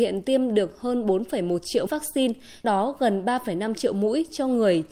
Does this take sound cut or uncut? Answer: cut